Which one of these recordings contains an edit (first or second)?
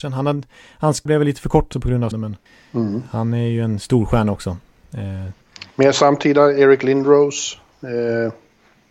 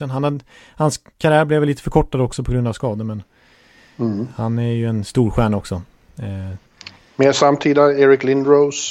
first